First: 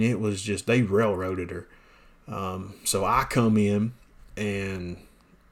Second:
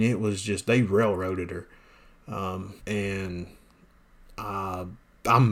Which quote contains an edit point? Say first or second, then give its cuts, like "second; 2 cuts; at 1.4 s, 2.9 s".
second; 1 cut; at 2.8 s